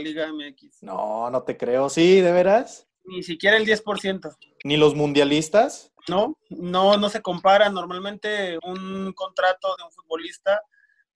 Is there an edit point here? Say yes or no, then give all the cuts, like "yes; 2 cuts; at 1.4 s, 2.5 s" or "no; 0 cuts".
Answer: yes; 4 cuts; at 2.9 s, 6.0 s, 8.6 s, 9.8 s